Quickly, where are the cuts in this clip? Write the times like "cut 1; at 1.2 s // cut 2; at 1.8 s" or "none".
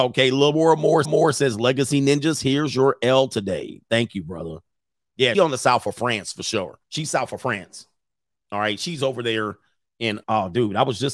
cut 1; at 1.0 s // cut 2; at 5.3 s // cut 3; at 6.8 s // cut 4; at 10.2 s